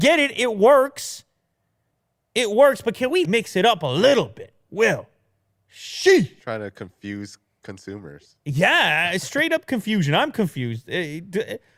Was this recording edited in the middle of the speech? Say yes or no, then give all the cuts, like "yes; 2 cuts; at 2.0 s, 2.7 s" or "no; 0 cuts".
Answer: yes; 2 cuts; at 3.2 s, 6.4 s